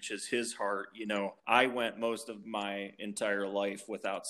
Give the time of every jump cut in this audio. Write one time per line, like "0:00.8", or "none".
0:01.4